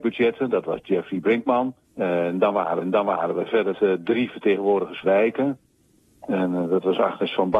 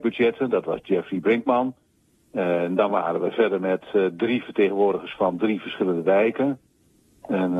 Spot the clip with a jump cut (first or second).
first